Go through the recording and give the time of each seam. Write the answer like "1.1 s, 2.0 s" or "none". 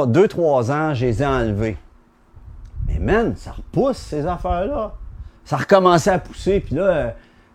5.4 s